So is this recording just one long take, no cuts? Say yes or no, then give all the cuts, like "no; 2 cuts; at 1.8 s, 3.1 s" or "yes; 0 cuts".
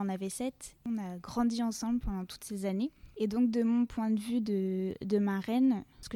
yes; 0 cuts